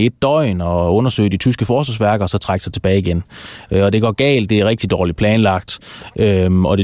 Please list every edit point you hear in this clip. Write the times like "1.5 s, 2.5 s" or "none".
none